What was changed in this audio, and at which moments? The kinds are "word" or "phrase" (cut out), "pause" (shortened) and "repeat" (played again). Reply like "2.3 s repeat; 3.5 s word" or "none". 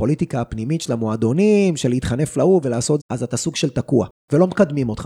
3.0 s word